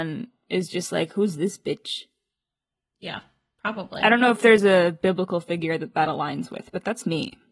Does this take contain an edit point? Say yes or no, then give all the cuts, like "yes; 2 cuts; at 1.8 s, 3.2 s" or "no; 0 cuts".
no; 0 cuts